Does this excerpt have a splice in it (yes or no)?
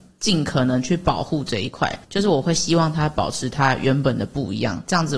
yes